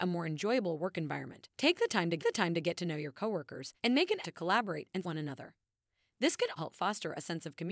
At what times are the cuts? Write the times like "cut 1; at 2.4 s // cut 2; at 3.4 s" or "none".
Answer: cut 1; at 1.5 s // cut 2; at 2.2 s // cut 3; at 3.8 s // cut 4; at 4.2 s // cut 5; at 5.0 s // cut 6; at 6.6 s